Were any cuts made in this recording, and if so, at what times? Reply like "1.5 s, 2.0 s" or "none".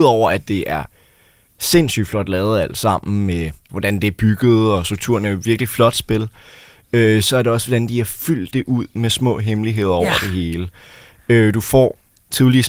none

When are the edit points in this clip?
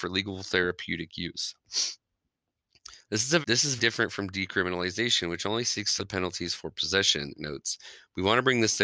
3.4 s, 3.8 s, 6.0 s, 7.3 s

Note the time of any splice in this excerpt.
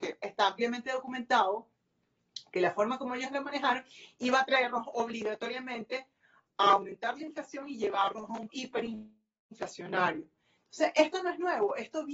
8.5 s

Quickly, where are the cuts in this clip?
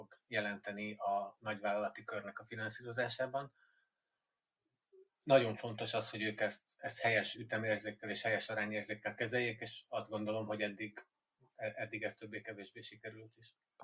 none

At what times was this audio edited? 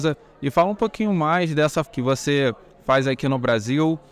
1.9 s

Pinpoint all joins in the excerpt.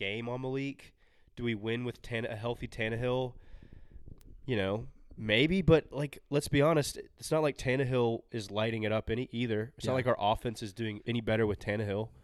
11.0 s

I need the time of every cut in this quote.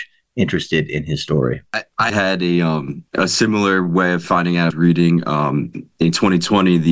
2.1 s, 3.1 s, 4.2 s, 4.7 s

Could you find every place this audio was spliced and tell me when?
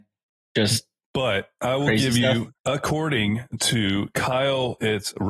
2.6 s

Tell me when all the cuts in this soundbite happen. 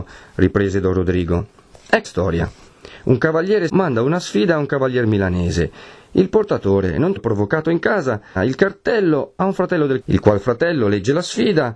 2.0 s, 3.7 s, 7.2 s, 8.4 s, 10.0 s

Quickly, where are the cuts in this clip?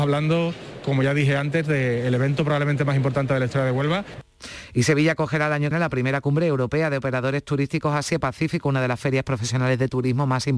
5.7 s

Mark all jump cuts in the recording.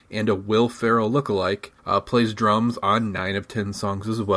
1.8 s

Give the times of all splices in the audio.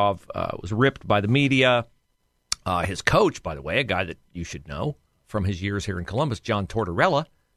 5.1 s

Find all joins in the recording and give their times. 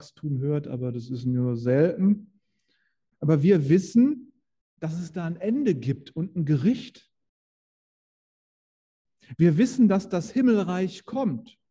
none

